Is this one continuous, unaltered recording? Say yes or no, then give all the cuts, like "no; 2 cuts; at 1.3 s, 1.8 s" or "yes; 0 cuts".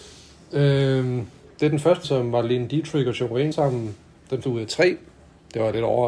no; 3 cuts; at 2.0 s, 3.5 s, 4.4 s